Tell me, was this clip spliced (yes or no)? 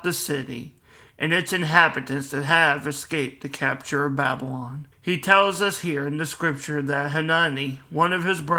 yes